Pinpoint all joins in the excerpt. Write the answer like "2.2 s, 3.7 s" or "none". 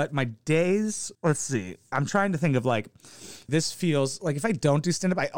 1.1 s, 1.9 s, 3.5 s